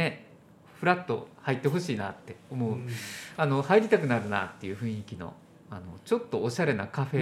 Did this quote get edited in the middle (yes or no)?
no